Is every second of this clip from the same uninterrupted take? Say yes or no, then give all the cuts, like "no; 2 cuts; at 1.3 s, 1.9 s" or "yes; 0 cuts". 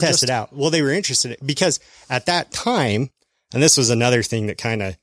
yes; 0 cuts